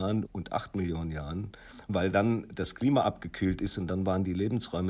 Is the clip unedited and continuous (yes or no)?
yes